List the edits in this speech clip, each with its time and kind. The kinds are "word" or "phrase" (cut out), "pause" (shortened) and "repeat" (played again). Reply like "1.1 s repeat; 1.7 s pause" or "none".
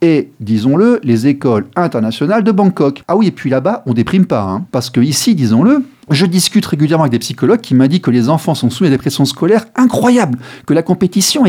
none